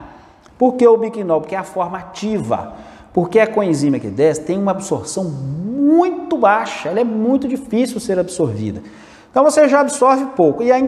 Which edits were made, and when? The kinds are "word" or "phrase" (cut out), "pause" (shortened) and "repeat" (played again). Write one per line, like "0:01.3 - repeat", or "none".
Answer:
none